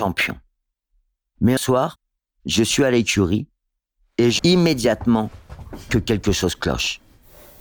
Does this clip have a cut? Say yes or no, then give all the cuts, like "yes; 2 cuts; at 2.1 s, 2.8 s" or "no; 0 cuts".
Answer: yes; 2 cuts; at 1.6 s, 4.4 s